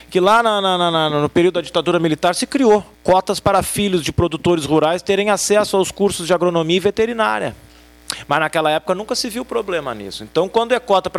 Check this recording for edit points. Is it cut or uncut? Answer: cut